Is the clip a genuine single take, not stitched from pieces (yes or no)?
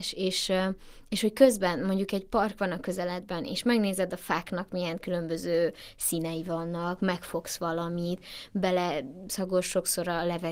yes